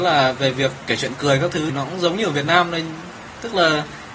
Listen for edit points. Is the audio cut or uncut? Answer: cut